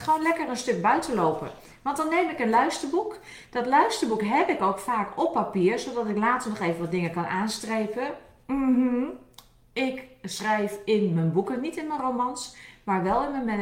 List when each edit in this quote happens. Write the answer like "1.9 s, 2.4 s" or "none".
none